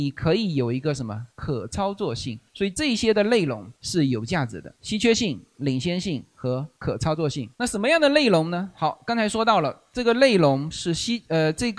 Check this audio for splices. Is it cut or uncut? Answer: cut